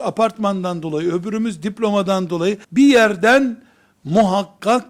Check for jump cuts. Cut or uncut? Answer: cut